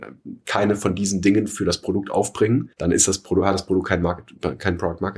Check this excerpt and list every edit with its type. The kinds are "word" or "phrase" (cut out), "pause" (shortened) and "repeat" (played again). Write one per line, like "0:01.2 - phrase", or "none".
0:02.7 - pause